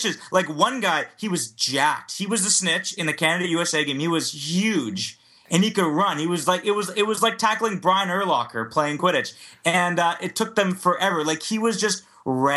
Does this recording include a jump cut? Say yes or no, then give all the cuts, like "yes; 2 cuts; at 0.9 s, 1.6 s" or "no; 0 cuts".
no; 0 cuts